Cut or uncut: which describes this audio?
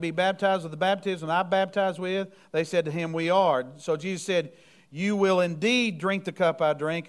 uncut